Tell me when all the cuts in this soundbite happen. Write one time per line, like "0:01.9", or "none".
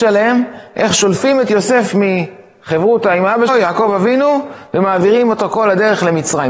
0:03.5

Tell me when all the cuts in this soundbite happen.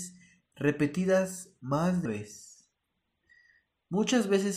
0:02.1

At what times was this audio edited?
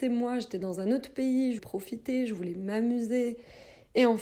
0:01.6

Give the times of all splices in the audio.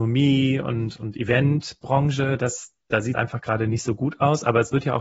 0:01.0
0:03.1

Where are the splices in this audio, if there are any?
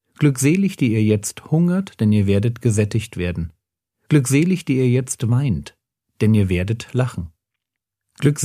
none

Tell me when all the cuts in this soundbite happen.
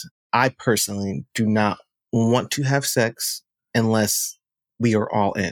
none

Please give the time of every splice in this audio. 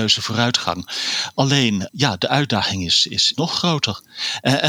0:01.9
0:03.3

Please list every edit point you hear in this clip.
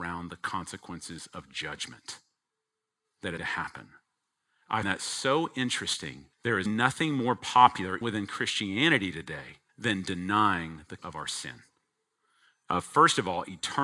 0:03.4
0:04.8
0:06.3
0:06.7
0:08.0
0:09.7
0:11.0

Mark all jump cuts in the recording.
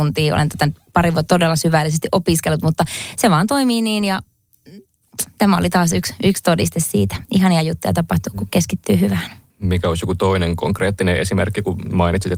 0:01.3
0:09.5

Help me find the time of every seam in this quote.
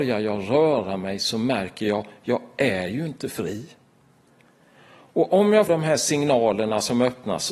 0:05.7

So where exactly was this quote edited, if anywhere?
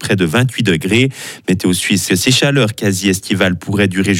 0:02.1

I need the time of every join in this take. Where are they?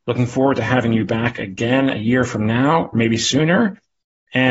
none

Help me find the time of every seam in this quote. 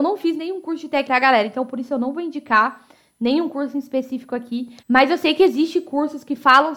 0:01.1
0:04.8

